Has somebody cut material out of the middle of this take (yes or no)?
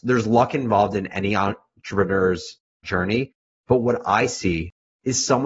no